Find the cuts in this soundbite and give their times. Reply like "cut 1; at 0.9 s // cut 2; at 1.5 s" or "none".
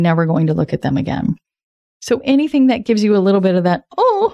none

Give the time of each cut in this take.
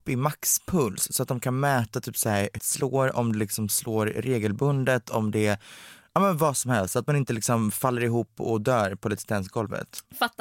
cut 1; at 2.6 s

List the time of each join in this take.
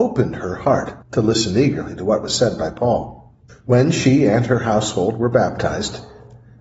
cut 1; at 1.0 s // cut 2; at 3.5 s

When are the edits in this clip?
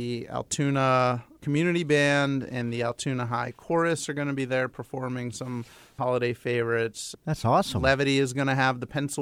none

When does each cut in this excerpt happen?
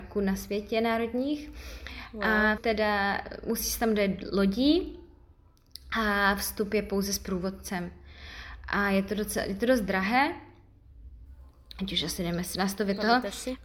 cut 1; at 2.6 s

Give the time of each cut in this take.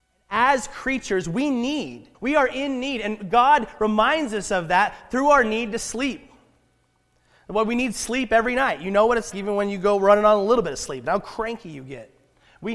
cut 1; at 2.1 s // cut 2; at 9.3 s

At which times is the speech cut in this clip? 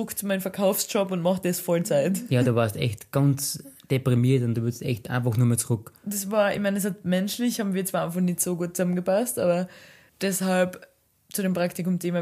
none

